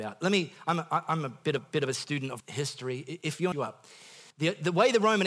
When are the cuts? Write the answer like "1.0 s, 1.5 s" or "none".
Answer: 1.6 s, 2.4 s, 3.5 s, 4.3 s